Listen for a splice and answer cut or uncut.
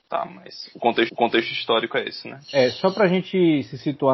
cut